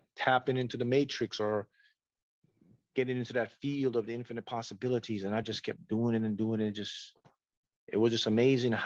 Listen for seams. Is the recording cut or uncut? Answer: uncut